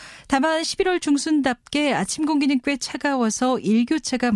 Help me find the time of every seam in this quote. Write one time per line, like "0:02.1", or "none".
none

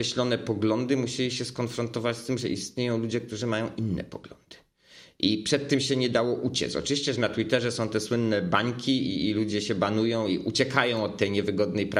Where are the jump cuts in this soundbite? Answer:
none

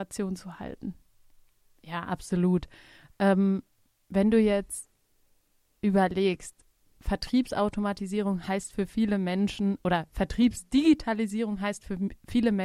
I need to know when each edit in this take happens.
none

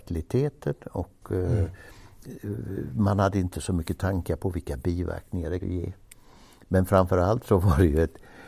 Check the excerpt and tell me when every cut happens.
0:05.6

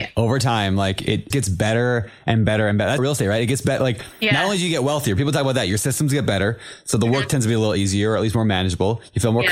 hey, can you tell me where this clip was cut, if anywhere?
0:01.3
0:03.0

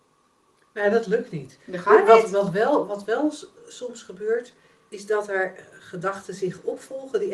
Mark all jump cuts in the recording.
none

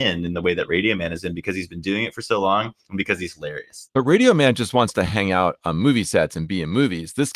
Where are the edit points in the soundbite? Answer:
none

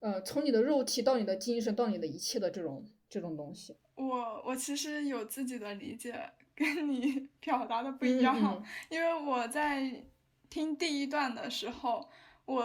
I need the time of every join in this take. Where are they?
none

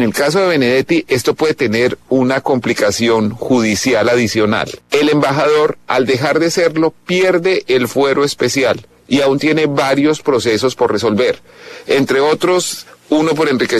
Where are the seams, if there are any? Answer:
0:04.8

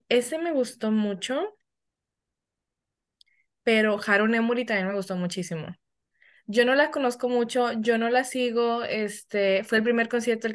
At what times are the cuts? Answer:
none

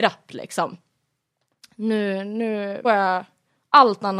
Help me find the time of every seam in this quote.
0:02.8

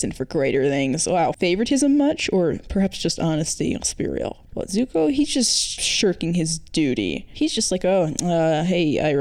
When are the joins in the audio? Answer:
none

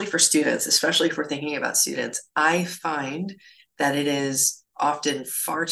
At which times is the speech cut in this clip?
none

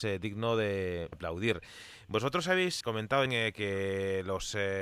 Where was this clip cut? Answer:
0:01.1
0:02.8
0:03.3

